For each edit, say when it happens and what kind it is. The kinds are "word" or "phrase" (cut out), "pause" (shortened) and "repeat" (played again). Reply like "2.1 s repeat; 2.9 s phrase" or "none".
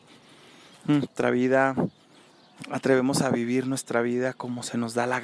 none